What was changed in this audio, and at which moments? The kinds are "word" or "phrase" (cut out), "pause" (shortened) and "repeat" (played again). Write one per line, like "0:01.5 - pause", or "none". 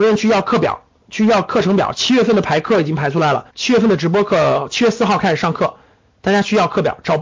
0:03.5 - pause